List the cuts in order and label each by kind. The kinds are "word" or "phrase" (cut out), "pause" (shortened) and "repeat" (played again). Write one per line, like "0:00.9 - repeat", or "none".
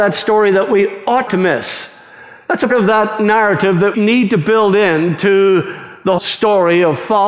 0:01.3 - word
0:02.7 - word
0:03.9 - word
0:06.2 - word